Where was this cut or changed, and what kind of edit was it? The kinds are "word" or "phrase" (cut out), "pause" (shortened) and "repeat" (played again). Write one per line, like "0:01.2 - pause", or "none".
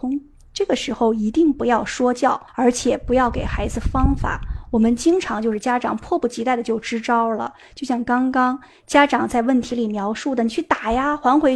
0:02.5 - pause